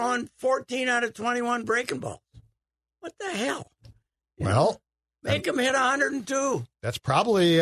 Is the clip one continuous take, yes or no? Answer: yes